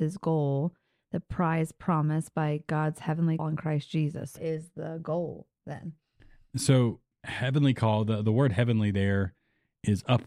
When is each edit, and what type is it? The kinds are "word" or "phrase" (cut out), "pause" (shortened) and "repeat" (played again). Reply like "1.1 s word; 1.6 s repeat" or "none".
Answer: 3.4 s word; 4.4 s word; 7.1 s word

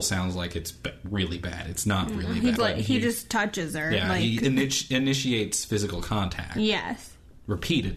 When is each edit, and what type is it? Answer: 2.6 s word

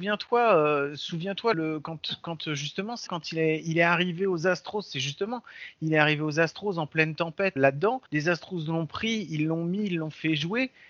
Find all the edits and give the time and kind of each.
1.5 s word; 3.1 s word; 7.6 s word; 8.1 s pause

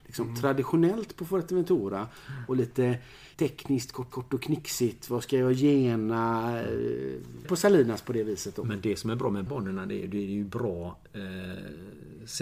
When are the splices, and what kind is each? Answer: 3.3 s pause; 4.1 s repeat; 7.4 s word; 9.5 s word

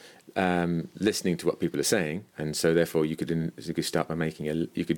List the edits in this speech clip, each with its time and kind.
2.3 s pause

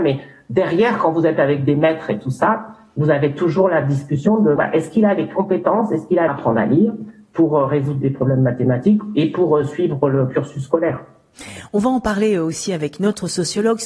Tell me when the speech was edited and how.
4.6 s word; 6.3 s phrase

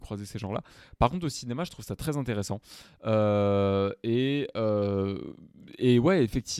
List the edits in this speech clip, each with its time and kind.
none

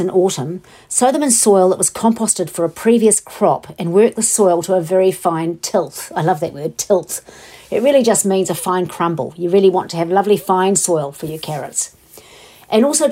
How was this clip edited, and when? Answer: none

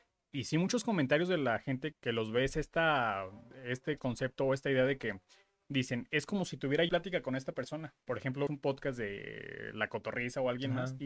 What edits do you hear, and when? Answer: 1.9 s word; 6.9 s word; 8.0 s pause; 8.5 s word

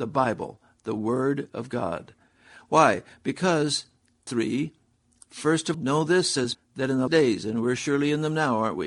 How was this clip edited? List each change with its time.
4.3 s word; 5.7 s word; 6.5 s word; 7.1 s word

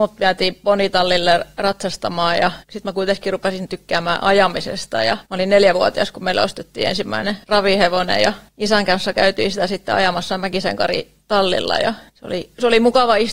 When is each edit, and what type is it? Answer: 2.6 s pause; 5.2 s pause; 7.4 s pause; 8.5 s pause; 12.1 s pause

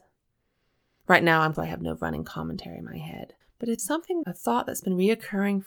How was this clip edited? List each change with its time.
1.5 s phrase; 3.4 s pause; 3.8 s word; 4.2 s phrase

